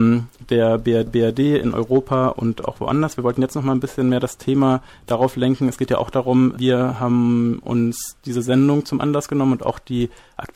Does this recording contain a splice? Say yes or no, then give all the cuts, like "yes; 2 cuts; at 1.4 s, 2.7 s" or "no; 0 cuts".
yes; 2 cuts; at 1.1 s, 6.6 s